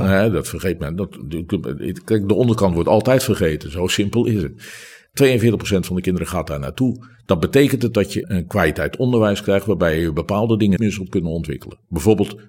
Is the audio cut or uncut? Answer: cut